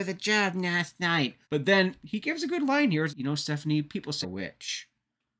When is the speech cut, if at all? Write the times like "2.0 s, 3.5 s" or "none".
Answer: 1.4 s, 3.1 s, 4.2 s